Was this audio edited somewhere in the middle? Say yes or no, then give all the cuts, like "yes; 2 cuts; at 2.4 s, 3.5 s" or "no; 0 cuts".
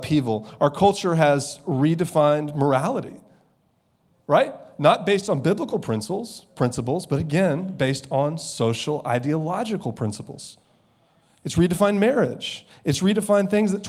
no; 0 cuts